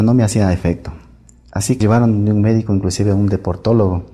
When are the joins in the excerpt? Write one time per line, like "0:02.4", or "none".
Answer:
0:01.8